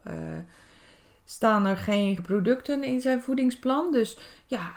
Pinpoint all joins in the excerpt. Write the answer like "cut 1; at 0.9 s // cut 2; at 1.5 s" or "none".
cut 1; at 2.2 s